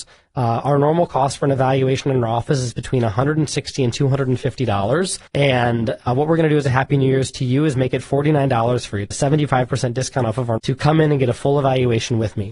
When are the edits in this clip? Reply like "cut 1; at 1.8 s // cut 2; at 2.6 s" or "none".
cut 1; at 5.3 s // cut 2; at 9.1 s // cut 3; at 10.6 s